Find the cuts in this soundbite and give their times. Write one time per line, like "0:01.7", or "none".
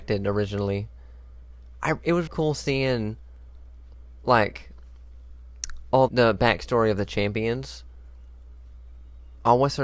0:02.3
0:06.1